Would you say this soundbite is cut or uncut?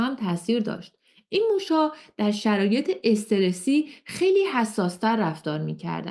uncut